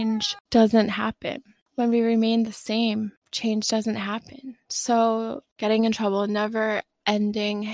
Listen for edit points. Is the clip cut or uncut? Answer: uncut